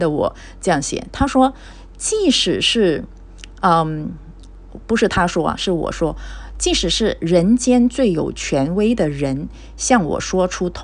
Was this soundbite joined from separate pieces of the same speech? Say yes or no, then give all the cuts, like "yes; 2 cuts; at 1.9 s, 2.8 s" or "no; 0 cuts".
no; 0 cuts